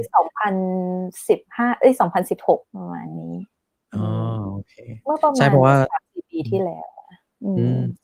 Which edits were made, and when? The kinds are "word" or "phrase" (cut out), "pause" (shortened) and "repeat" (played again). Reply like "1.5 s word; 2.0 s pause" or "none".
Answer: 2.7 s pause